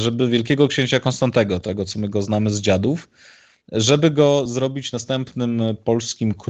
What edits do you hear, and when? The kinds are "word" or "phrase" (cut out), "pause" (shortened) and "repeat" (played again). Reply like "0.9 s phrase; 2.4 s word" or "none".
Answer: none